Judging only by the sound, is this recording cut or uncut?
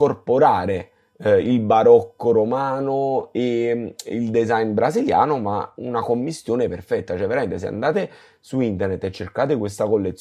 uncut